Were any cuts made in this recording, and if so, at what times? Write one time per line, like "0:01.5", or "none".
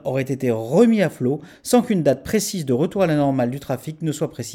none